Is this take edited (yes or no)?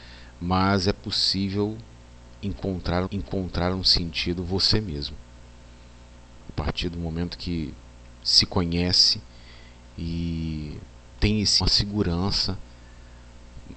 yes